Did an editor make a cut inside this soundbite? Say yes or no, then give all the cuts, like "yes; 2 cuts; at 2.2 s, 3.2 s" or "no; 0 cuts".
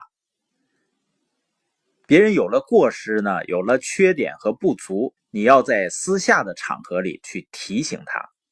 yes; 1 cut; at 5.2 s